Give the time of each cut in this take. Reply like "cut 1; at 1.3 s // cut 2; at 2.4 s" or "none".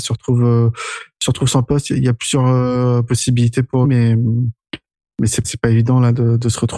cut 1; at 3.8 s // cut 2; at 5.4 s